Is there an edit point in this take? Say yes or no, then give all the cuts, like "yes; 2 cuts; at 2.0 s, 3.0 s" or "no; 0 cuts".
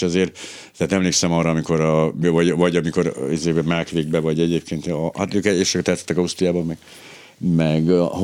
no; 0 cuts